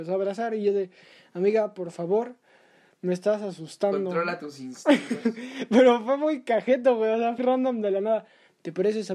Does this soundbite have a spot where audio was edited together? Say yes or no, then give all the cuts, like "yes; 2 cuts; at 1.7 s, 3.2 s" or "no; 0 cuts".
yes; 1 cut; at 7.4 s